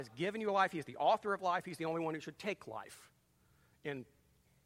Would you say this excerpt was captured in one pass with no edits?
yes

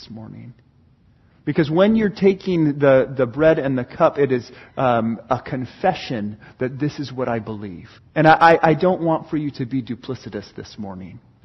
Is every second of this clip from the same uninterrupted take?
no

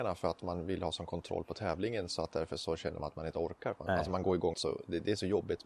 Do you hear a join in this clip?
yes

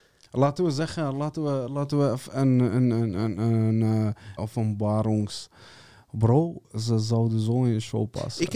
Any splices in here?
yes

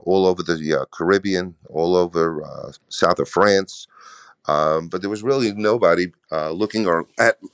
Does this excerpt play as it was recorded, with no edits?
no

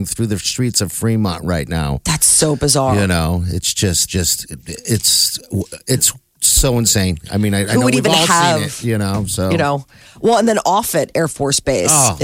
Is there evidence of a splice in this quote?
yes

